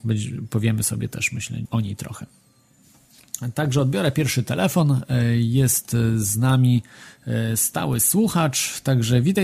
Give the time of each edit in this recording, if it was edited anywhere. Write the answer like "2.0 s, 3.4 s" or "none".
1.6 s